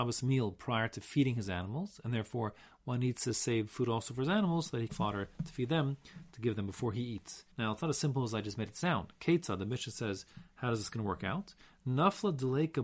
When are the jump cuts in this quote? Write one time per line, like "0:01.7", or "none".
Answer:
0:04.9
0:07.5